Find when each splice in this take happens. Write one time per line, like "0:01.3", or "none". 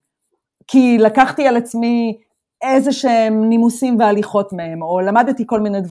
none